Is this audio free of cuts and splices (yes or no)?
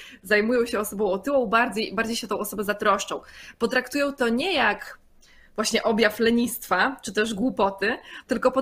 yes